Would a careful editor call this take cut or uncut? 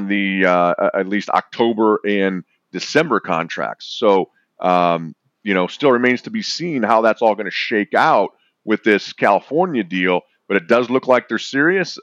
uncut